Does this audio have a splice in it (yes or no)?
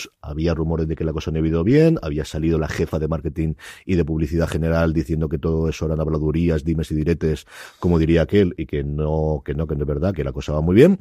no